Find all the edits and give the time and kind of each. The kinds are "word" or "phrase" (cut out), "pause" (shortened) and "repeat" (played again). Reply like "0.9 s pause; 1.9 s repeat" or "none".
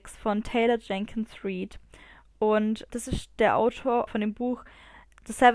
2.9 s word; 4.1 s phrase